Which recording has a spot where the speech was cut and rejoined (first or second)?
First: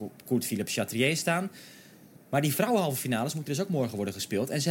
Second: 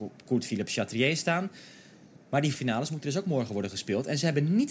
second